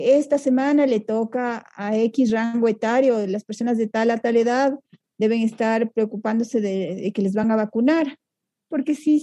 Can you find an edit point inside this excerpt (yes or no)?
no